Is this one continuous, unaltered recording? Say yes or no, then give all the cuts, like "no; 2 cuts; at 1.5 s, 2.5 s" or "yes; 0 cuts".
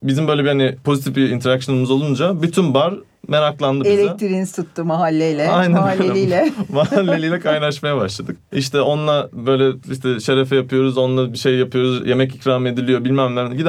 no; 1 cut; at 9.8 s